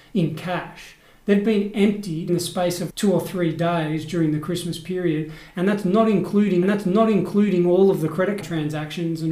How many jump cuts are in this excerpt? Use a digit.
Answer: 4